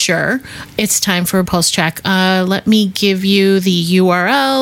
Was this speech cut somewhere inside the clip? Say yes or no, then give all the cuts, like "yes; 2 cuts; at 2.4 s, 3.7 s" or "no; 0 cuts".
yes; 1 cut; at 1.5 s